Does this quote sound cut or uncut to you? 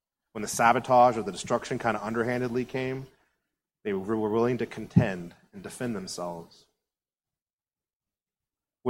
uncut